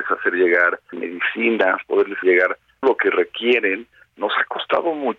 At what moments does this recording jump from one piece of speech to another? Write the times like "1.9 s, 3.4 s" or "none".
0.9 s, 2.2 s, 2.8 s